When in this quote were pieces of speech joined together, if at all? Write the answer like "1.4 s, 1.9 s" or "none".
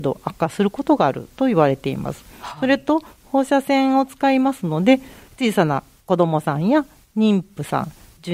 none